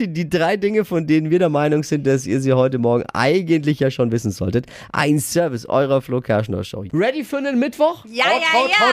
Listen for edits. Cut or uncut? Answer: uncut